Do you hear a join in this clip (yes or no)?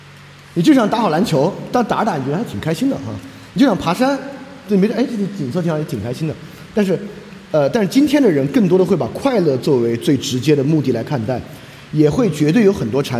no